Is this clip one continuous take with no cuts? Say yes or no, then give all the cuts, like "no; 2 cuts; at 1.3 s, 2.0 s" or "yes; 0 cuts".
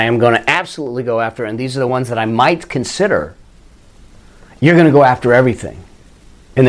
yes; 0 cuts